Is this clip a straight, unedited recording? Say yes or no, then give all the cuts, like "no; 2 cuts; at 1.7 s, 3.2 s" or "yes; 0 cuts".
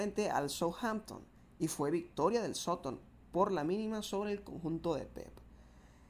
yes; 0 cuts